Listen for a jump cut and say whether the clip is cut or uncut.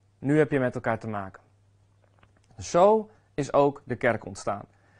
uncut